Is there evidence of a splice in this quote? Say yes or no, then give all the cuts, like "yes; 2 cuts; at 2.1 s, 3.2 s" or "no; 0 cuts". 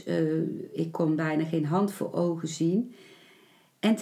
no; 0 cuts